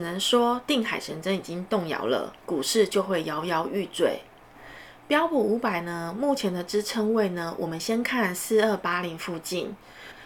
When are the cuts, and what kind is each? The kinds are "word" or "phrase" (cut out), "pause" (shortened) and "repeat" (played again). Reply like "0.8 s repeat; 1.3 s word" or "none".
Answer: 2.4 s pause